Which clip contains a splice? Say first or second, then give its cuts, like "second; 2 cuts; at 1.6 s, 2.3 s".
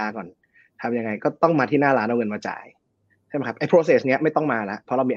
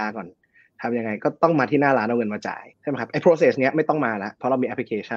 second; 1 cut; at 2.7 s